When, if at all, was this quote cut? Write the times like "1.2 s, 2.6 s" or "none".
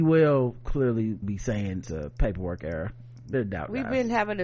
1.2 s, 1.8 s, 3.3 s